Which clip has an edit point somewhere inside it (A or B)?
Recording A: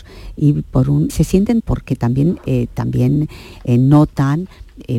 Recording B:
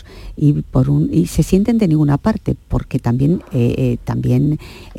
A